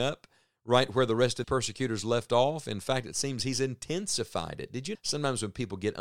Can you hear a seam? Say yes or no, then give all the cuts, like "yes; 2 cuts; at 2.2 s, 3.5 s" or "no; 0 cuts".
yes; 2 cuts; at 1.4 s, 4.9 s